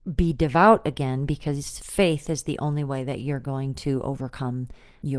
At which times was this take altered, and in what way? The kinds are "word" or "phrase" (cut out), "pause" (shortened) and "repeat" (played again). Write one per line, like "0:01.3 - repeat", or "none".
none